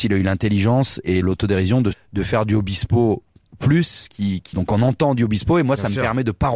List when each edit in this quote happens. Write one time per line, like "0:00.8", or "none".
0:01.2
0:01.9
0:03.6
0:04.5